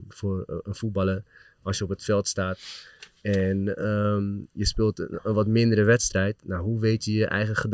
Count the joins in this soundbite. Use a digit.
0